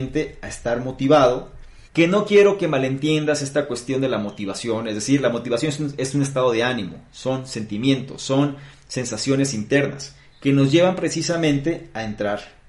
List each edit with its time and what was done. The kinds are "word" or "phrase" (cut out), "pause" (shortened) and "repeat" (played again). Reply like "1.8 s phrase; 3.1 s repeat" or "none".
1.9 s pause